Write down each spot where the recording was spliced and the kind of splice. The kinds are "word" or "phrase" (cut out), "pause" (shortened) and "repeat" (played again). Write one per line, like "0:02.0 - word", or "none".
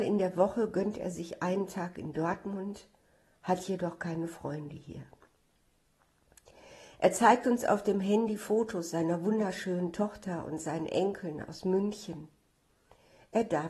none